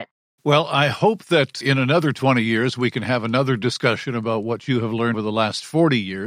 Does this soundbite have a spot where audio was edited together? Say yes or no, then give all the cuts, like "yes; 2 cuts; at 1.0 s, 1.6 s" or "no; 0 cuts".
yes; 2 cuts; at 1.6 s, 5.1 s